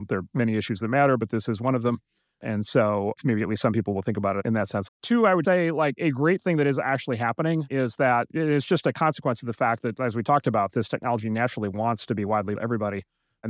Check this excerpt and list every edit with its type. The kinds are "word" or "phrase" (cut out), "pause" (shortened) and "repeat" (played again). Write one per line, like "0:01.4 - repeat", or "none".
0:04.9 - word
0:05.4 - word
0:12.6 - word